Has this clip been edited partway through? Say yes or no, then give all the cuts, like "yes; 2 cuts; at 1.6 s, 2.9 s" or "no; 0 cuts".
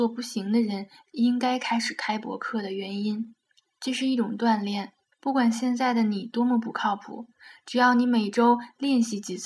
yes; 2 cuts; at 3.5 s, 5.1 s